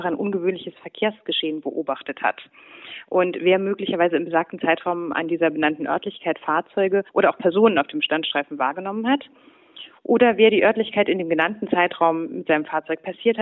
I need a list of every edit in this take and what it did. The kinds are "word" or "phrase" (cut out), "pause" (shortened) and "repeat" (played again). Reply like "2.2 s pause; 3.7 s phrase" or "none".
7.1 s pause